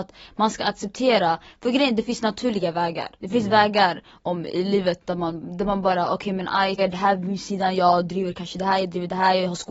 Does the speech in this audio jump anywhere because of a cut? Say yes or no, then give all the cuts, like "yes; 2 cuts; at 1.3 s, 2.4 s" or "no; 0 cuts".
yes; 2 cuts; at 3.2 s, 6.8 s